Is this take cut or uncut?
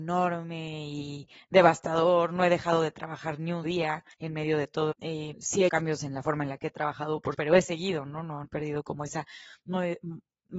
cut